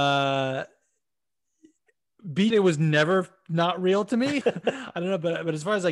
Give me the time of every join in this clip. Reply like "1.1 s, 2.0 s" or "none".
2.5 s, 4.4 s